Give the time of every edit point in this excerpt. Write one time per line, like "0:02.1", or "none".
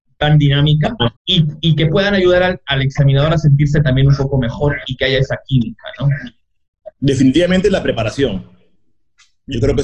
0:01.2
0:06.9